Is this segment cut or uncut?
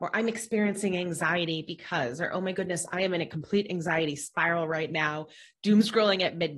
uncut